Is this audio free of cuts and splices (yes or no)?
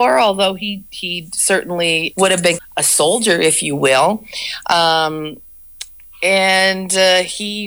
no